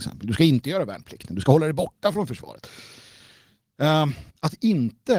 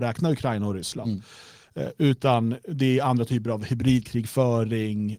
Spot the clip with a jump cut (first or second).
first